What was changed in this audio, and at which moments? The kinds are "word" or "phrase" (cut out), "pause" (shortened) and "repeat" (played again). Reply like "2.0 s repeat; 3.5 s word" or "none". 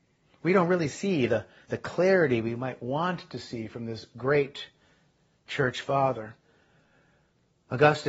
none